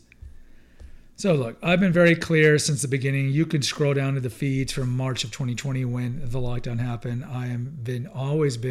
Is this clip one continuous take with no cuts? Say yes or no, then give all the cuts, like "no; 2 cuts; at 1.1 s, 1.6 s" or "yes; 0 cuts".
yes; 0 cuts